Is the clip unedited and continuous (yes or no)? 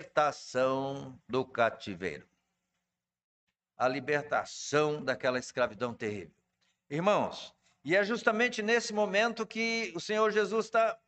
yes